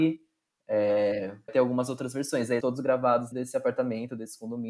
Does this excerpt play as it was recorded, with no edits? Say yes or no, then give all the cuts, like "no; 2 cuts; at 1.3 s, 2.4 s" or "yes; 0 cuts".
no; 3 cuts; at 1.5 s, 2.6 s, 3.3 s